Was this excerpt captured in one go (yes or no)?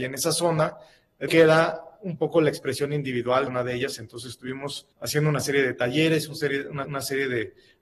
no